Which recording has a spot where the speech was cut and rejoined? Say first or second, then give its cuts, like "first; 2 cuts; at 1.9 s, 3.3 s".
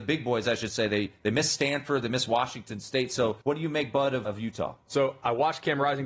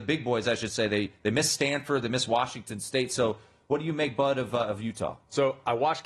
first; 2 cuts; at 3.4 s, 4.2 s